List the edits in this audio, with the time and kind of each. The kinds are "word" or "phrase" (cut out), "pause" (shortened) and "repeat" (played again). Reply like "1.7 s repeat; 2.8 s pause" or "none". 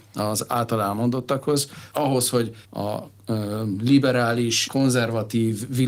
1.9 s word; 2.6 s word; 4.7 s word